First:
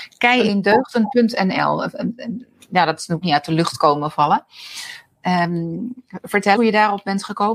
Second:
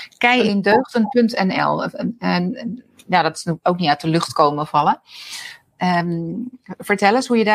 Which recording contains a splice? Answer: first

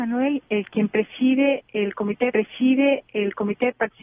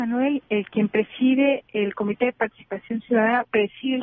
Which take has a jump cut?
first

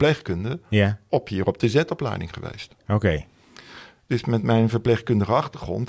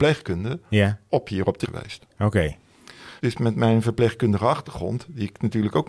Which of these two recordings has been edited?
second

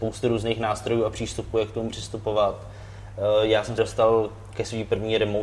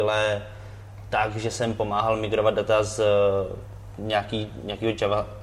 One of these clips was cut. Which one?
first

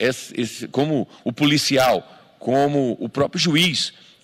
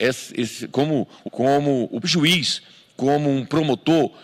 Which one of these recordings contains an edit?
second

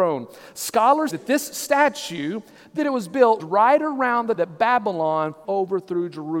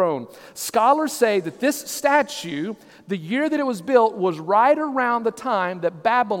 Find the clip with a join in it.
first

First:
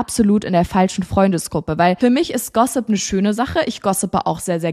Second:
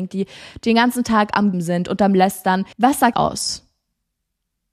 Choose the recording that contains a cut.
second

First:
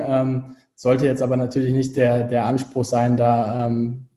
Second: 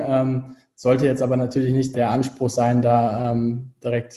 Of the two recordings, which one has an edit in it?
second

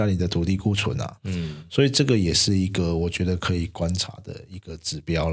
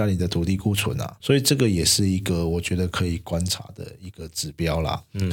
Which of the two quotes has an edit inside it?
second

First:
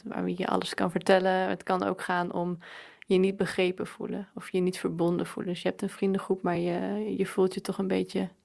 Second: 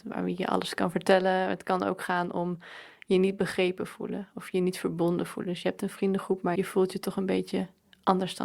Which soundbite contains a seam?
second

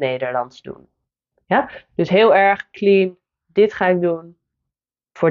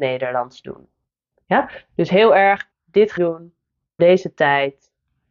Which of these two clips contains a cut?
second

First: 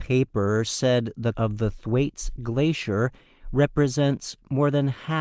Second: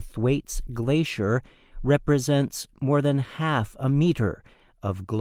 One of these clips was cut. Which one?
first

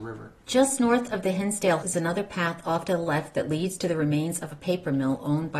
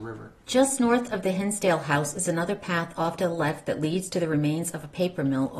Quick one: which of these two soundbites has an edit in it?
first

